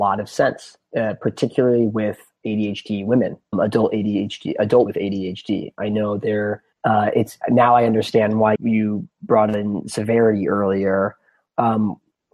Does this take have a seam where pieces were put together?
yes; 5 cuts; at 3.5 s, 4.9 s, 6.7 s, 7.4 s, 8.6 s

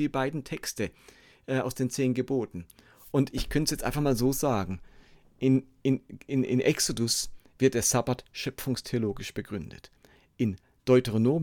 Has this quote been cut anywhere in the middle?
no; 0 cuts

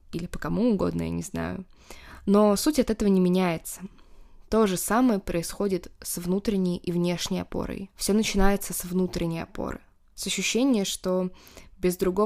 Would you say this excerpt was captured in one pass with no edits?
no; 1 cut; at 7.9 s

